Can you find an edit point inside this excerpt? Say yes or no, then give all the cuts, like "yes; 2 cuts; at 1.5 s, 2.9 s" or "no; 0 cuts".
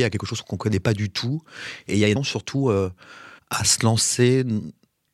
yes; 2 cuts; at 2.1 s, 3.4 s